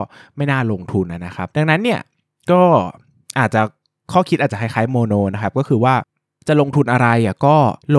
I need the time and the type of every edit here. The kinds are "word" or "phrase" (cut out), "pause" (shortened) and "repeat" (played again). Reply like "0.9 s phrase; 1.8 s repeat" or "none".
none